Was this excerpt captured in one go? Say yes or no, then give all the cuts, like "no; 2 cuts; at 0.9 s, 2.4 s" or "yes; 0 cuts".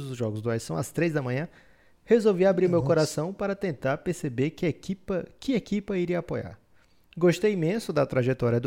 yes; 0 cuts